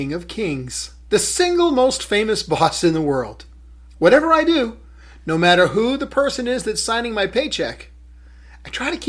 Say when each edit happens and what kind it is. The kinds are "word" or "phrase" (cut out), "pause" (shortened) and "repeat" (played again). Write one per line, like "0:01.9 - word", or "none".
0:01.1 - pause
0:03.7 - pause